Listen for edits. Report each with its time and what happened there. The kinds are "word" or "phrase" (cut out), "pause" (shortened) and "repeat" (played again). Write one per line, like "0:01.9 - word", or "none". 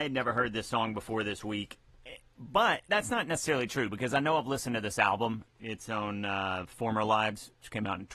0:02.9 - word